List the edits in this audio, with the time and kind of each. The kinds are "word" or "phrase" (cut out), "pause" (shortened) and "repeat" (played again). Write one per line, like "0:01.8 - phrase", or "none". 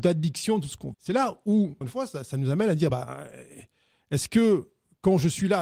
0:00.9 - word
0:01.8 - word
0:02.9 - word